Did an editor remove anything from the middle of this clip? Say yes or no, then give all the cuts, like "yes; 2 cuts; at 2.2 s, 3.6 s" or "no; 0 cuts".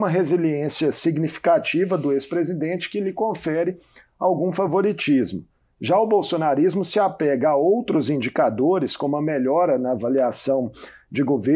no; 0 cuts